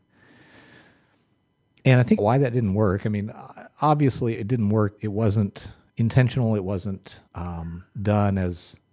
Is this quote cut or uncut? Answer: cut